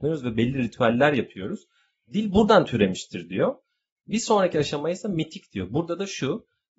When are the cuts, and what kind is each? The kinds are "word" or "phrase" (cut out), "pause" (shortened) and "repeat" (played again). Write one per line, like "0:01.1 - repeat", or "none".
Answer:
none